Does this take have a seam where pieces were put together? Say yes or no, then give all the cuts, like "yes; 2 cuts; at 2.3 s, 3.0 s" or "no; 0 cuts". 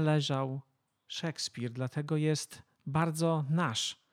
no; 0 cuts